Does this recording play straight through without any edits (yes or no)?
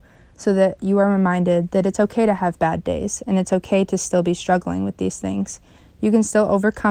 yes